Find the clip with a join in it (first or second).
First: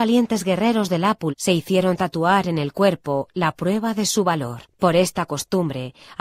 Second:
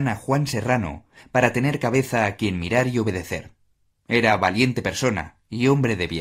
first